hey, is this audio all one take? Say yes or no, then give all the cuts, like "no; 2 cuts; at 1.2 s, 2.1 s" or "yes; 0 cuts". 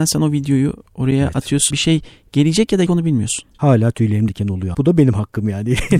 no; 4 cuts; at 1.7 s, 2.9 s, 4.3 s, 4.7 s